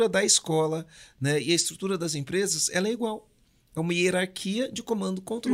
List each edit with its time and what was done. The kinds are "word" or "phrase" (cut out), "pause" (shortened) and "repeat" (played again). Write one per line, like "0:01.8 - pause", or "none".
none